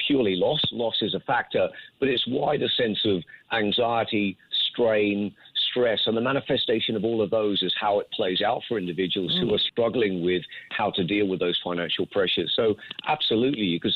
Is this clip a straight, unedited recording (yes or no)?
yes